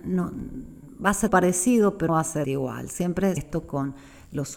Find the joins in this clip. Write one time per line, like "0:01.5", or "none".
0:01.3
0:02.1
0:02.4
0:03.4